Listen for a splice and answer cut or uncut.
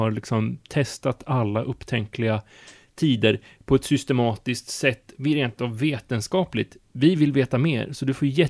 uncut